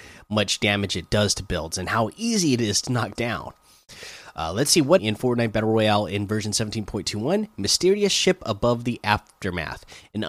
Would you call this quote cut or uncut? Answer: cut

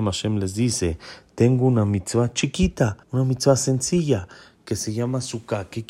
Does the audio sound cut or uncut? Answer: cut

